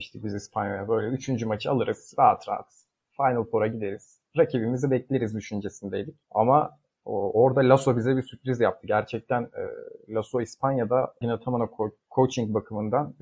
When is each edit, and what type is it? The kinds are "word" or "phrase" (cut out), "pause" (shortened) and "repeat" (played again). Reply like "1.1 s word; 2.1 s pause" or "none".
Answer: 6.2 s pause; 11.2 s word